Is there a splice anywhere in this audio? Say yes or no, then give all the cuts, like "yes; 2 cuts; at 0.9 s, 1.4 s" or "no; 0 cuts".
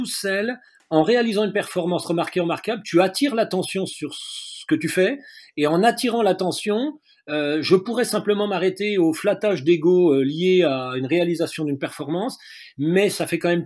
no; 0 cuts